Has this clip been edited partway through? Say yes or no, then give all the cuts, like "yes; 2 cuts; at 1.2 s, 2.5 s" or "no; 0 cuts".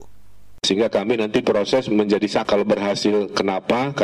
yes; 2 cuts; at 1.4 s, 2.4 s